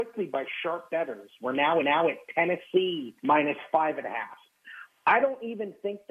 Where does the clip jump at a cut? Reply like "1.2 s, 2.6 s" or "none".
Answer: 1.8 s, 3.2 s